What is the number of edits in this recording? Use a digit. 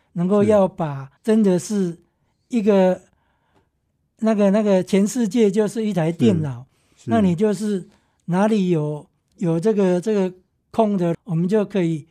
3